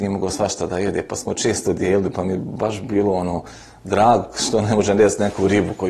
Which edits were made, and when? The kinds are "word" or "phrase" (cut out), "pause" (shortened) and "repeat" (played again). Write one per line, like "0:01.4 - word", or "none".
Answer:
none